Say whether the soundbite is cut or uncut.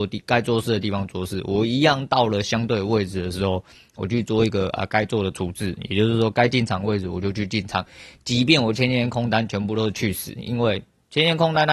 uncut